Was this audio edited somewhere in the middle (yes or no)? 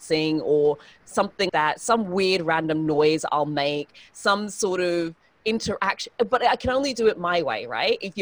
yes